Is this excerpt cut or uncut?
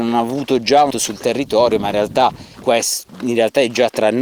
cut